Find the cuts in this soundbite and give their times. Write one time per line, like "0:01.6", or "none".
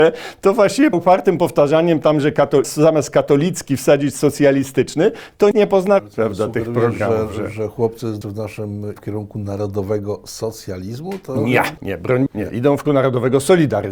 0:00.9
0:02.6
0:05.5
0:06.0
0:08.2
0:09.0
0:11.8
0:12.3
0:12.8